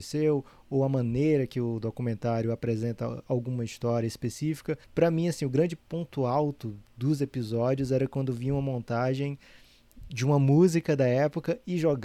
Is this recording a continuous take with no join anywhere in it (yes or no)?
no